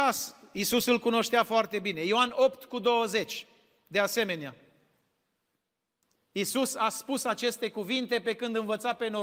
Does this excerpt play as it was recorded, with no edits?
yes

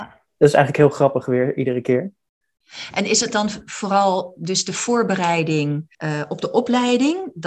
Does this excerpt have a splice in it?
yes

